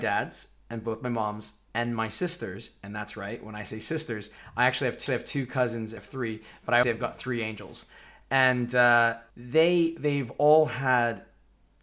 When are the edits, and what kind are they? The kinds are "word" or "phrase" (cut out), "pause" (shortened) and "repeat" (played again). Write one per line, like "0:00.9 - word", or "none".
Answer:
0:01.7 - pause
0:05.1 - repeat
0:06.0 - phrase
0:06.8 - word
0:09.3 - pause

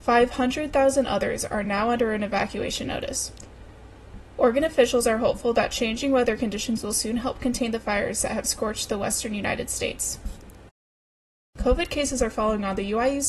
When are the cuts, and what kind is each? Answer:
none

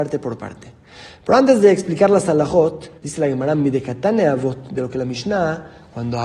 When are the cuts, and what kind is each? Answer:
0:03.0 - pause

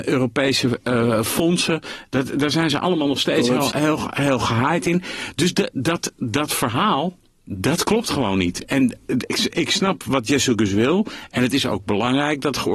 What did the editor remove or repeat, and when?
0:03.7 - word

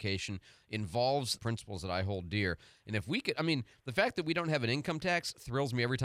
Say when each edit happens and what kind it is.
0:01.4 - phrase

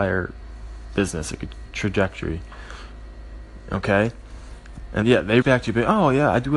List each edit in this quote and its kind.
0:01.7 - phrase
0:05.0 - word
0:05.4 - word

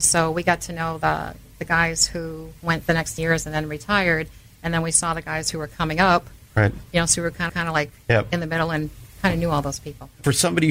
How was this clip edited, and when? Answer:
0:03.2 - word
0:07.5 - repeat

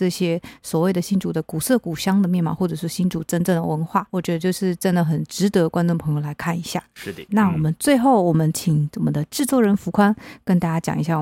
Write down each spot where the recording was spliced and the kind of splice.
0:04.1 - pause
0:07.3 - word

